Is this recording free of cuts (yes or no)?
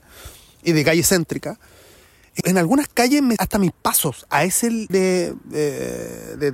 no